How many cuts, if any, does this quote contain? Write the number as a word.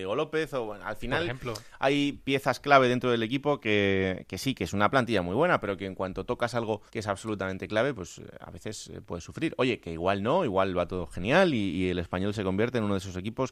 one